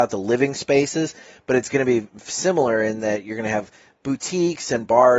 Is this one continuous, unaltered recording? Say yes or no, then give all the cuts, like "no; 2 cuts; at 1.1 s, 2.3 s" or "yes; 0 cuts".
yes; 0 cuts